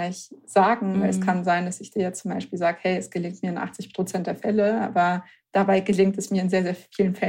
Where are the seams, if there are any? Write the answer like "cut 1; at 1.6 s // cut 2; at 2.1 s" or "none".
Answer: none